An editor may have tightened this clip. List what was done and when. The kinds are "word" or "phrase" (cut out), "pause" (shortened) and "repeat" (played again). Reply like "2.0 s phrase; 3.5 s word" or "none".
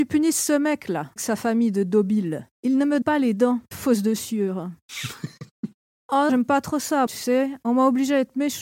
1.2 s word; 2.5 s pause; 3.0 s word; 3.7 s word; 6.3 s word; 7.1 s word